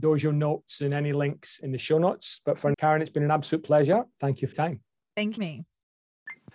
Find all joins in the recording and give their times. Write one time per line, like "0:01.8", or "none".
0:01.6
0:02.7
0:04.5
0:05.4